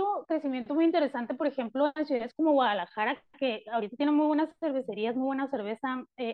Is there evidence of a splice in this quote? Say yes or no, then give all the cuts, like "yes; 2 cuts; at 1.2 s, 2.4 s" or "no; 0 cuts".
no; 0 cuts